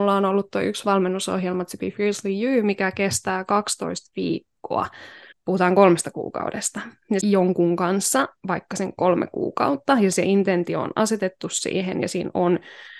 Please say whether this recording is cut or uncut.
cut